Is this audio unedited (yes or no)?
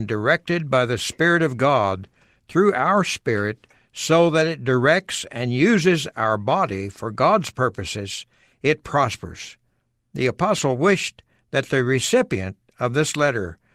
yes